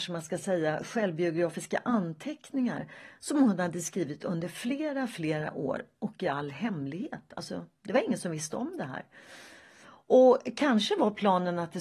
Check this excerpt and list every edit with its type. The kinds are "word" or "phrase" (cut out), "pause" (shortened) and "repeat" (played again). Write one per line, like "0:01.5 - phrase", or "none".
none